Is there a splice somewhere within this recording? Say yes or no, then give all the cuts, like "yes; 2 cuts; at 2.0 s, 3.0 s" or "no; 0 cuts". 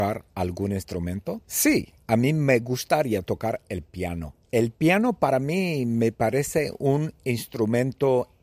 yes; 2 cuts; at 1.4 s, 4.4 s